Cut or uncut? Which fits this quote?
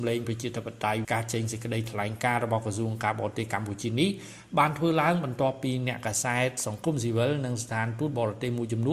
cut